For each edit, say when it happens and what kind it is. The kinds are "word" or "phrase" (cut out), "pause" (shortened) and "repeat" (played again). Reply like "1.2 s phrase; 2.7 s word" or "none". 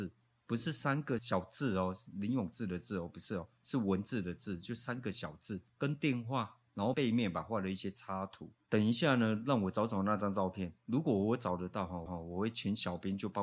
12.1 s repeat